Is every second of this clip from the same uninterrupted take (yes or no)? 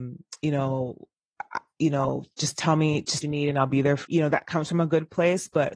no